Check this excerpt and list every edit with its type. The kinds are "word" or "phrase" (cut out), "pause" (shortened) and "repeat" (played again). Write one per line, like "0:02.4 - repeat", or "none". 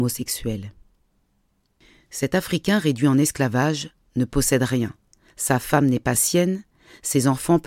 none